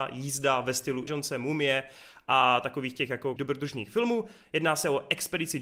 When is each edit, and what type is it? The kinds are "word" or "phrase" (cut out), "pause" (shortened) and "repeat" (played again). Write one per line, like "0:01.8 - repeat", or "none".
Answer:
0:01.1 - word
0:03.4 - word